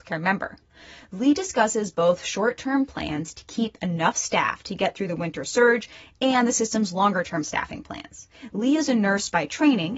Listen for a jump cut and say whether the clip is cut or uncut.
uncut